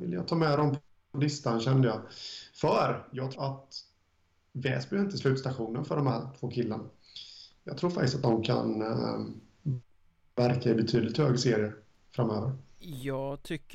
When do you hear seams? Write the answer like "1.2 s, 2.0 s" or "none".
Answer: 3.3 s, 10.1 s